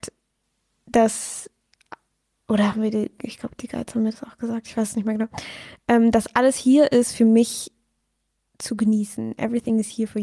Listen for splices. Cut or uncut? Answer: uncut